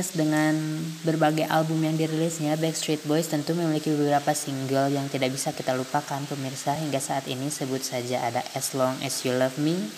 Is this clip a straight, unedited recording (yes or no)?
yes